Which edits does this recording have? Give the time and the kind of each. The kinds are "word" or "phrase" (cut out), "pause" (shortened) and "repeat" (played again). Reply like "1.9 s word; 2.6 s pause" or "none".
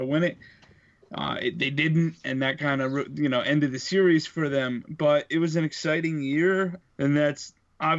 6.8 s word